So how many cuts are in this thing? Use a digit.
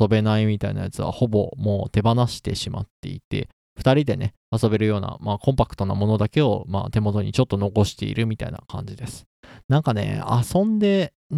1